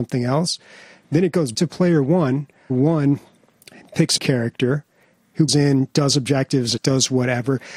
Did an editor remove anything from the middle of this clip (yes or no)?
yes